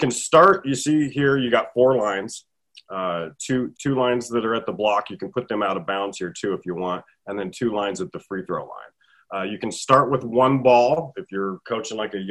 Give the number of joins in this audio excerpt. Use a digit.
1